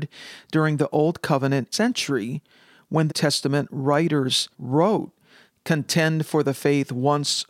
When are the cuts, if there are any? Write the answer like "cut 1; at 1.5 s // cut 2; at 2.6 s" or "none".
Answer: cut 1; at 1.7 s // cut 2; at 3.1 s // cut 3; at 4.5 s